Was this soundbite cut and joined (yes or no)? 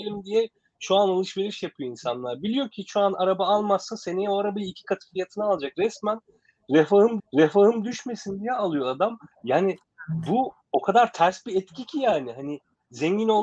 yes